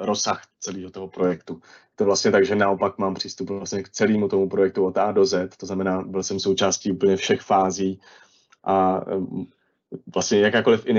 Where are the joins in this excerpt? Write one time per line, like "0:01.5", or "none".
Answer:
none